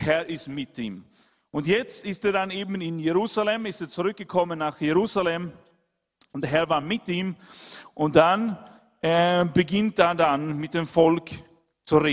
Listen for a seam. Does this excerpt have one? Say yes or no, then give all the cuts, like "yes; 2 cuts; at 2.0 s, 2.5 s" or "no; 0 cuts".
no; 0 cuts